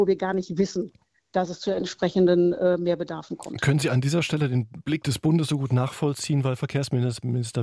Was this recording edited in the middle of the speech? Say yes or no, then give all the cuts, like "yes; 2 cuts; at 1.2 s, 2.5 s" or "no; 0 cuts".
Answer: no; 0 cuts